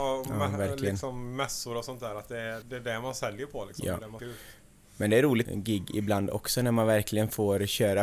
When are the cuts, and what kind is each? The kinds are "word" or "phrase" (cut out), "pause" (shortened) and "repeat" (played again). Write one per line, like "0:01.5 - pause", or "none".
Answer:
0:02.6 - word
0:04.2 - word
0:05.4 - phrase